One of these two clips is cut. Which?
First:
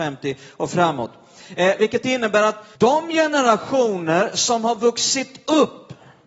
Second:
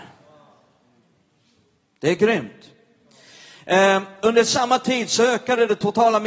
first; 1 cut; at 2.8 s

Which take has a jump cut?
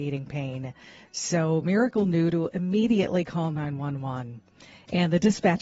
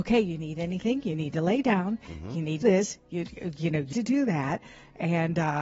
second; 2 cuts; at 2.6 s, 3.9 s

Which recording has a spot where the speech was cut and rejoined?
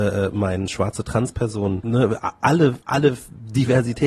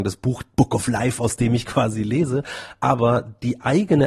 first; 1 cut; at 2.8 s

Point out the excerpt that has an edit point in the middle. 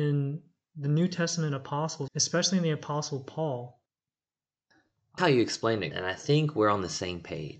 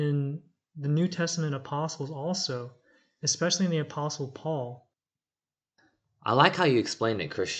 first; 3 cuts; at 2.1 s, 5.2 s, 5.9 s

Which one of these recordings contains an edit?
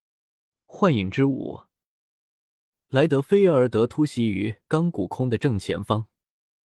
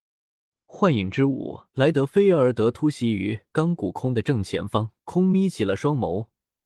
second; 2 cuts; at 1.7 s, 5.0 s

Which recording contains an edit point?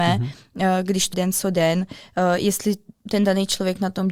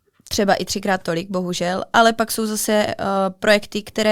first; 1 cut; at 1.1 s

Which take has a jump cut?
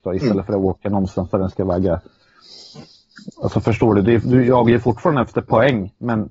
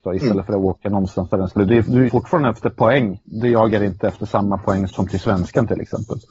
second; 4 cuts; at 1.6 s, 2.1 s, 3.2 s, 4.9 s

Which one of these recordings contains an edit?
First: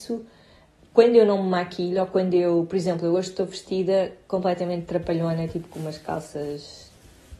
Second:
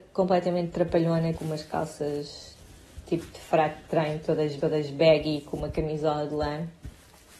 second; 2 cuts; at 1.3 s, 4.6 s

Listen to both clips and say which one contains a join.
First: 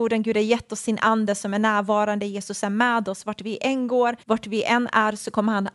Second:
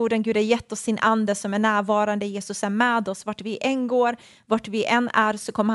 first; 1 cut; at 4.2 s

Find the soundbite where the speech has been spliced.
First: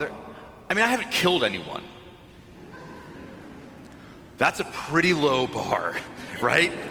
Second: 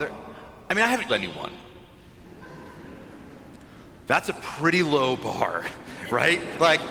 second; 1 cut; at 1.1 s

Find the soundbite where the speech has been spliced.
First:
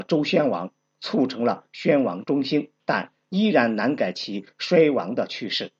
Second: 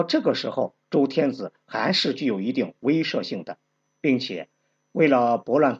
first; 1 cut; at 2.8 s

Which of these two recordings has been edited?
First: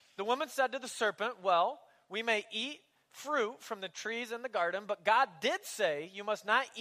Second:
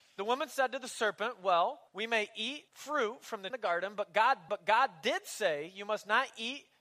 second; 4 cuts; at 1.9 s, 2.7 s, 3.5 s, 4.5 s

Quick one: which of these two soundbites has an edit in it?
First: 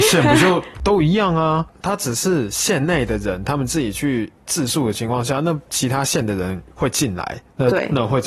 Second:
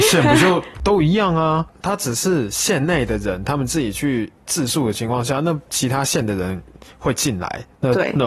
first; 1 cut; at 6.7 s

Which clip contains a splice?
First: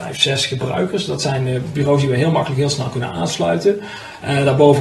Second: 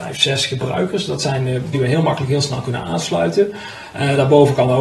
second; 1 cut; at 1.7 s

